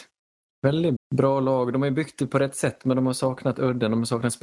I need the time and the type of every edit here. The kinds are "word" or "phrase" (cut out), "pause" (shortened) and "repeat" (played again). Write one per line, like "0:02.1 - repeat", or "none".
0:01.0 - word